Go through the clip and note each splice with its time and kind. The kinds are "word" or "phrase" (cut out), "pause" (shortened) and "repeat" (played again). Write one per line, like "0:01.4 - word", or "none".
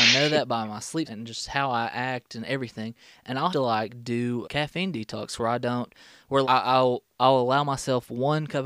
0:01.0 - word
0:03.5 - word
0:04.4 - word
0:06.4 - word